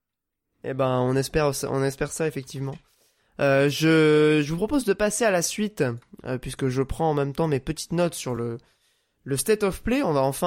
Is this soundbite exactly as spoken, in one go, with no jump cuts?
yes; 0 cuts

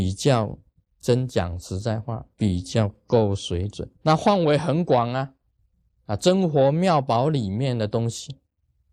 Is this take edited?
yes; 2 cuts; at 2.3 s, 3.9 s

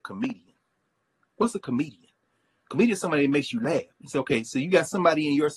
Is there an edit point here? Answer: yes; 1 cut; at 3.9 s

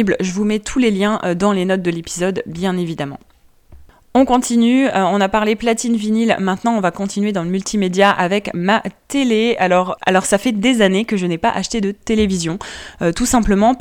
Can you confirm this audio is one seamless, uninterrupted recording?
yes; 0 cuts

